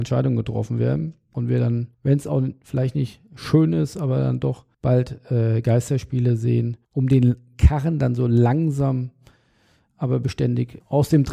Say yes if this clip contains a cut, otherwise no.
yes